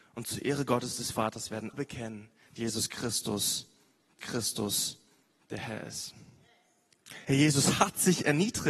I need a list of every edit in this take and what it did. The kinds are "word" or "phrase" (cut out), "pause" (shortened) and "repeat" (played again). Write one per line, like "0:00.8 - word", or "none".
0:01.7 - word
0:02.6 - word
0:04.2 - repeat
0:07.2 - pause